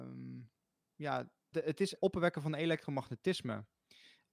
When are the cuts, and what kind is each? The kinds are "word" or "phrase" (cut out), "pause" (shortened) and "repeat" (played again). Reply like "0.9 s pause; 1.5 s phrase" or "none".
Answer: 1.5 s word; 2.0 s phrase